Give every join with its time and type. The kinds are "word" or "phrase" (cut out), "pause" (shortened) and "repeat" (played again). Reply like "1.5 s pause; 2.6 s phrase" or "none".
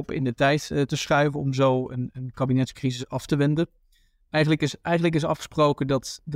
none